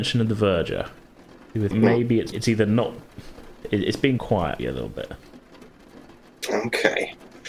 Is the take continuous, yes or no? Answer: no